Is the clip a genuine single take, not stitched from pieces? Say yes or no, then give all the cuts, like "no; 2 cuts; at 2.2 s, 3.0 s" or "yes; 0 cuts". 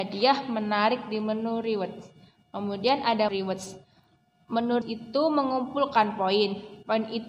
no; 2 cuts; at 3.3 s, 4.8 s